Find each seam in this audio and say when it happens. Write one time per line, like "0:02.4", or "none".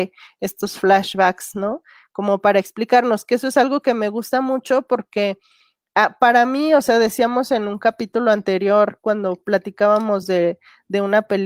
none